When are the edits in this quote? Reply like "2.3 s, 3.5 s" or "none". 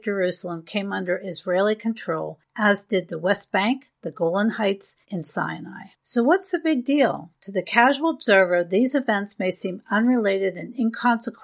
5.0 s